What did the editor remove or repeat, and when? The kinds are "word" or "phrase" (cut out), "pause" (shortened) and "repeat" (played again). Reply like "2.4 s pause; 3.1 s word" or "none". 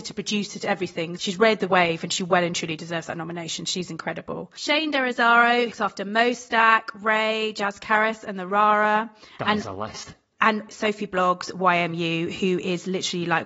1.2 s word; 5.7 s word; 10.7 s word